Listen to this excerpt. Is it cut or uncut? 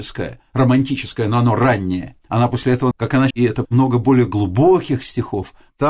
cut